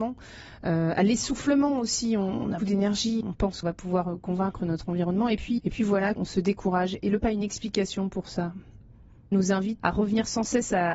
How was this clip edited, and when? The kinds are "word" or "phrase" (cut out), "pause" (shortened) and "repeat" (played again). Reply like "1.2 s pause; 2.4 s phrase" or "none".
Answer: 2.6 s word; 3.2 s word; 3.6 s word; 5.6 s word; 6.2 s word; 7.2 s word; 9.3 s word; 9.8 s word